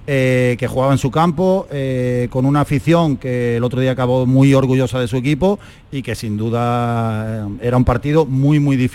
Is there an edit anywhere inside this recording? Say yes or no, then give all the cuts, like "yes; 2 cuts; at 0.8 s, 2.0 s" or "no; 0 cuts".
no; 0 cuts